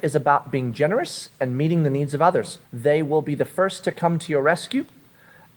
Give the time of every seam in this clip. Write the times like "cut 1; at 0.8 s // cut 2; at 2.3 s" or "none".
cut 1; at 2.6 s